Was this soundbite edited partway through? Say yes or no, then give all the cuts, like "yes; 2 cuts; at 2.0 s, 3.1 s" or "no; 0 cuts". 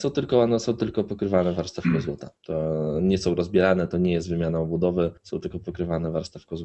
yes; 2 cuts; at 2.4 s, 5.2 s